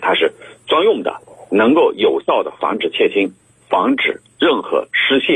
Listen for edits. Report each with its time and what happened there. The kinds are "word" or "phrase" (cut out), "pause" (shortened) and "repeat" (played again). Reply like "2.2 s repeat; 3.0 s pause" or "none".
none